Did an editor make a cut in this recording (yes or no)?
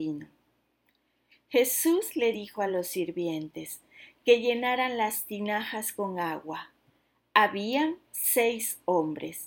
no